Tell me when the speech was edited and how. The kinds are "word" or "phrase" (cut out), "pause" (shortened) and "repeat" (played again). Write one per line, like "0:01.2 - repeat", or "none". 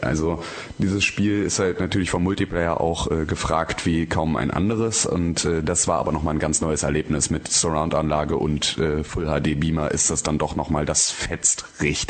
none

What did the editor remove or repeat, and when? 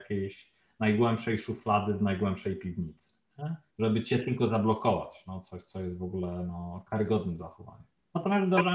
0:03.7 - pause

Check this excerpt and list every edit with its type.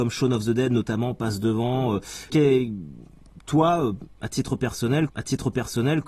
0:02.3 - word
0:05.1 - repeat

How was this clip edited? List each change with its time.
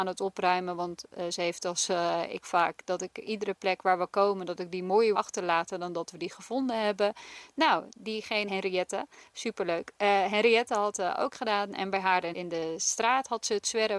0:02.4 - word
0:05.1 - word
0:08.5 - word
0:10.9 - word
0:12.3 - word

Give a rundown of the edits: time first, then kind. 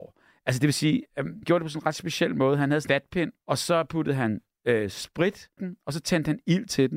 0:01.4 - word
0:02.9 - word
0:03.4 - pause
0:05.6 - word

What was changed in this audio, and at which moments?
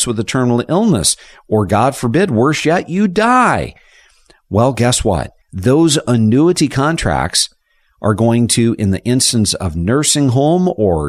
0:05.4 - pause

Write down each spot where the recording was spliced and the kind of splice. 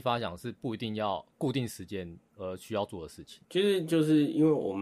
0:02.3 - pause

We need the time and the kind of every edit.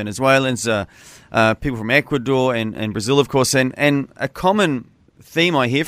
none

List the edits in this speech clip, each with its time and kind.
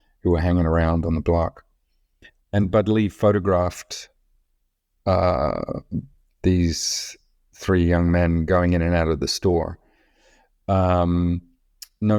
none

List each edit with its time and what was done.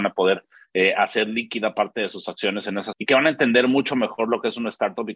0:02.9 - phrase

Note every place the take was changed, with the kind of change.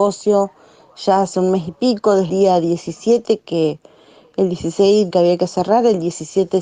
0:02.3 - word
0:05.1 - word

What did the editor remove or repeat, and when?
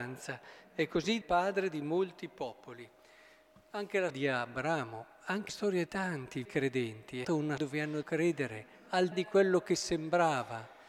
0:01.2 - word
0:04.1 - word
0:05.5 - word
0:05.9 - word
0:06.4 - word
0:07.2 - word
0:07.6 - word
0:08.0 - word
0:09.1 - word

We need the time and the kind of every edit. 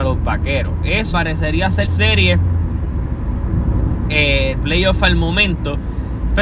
0:01.1 - phrase
0:01.9 - word
0:04.6 - word

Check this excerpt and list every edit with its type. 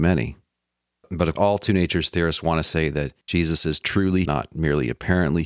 0:01.4 - word
0:04.3 - word

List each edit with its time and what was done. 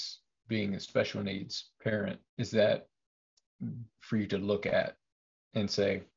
0:02.3 - pause
0:04.0 - phrase

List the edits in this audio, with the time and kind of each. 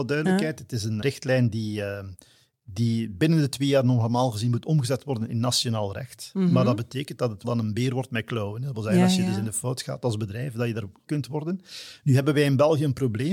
0:01.0 - word
0:07.4 - word
0:11.1 - word

